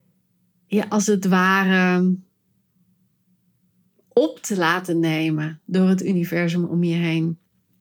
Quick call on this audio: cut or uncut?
uncut